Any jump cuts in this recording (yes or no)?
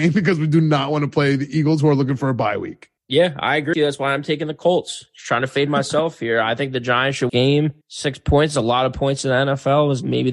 yes